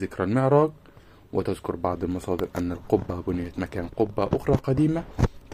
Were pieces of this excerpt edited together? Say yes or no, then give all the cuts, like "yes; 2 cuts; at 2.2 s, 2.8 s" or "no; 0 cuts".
no; 0 cuts